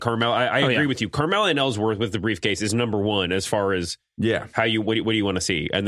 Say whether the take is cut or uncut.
uncut